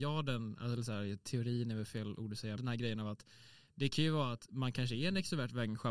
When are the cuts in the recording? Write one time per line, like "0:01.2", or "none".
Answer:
0:02.6